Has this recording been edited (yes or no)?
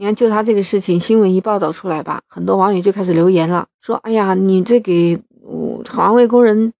yes